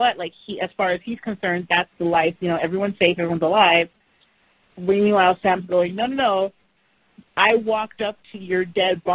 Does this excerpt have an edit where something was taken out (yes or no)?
no